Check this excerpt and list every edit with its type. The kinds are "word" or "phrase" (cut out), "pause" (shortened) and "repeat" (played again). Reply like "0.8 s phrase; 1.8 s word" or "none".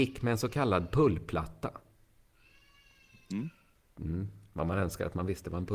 none